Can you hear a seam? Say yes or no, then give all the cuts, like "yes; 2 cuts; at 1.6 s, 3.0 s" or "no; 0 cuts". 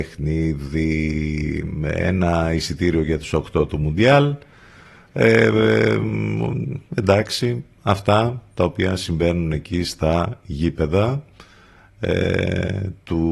no; 0 cuts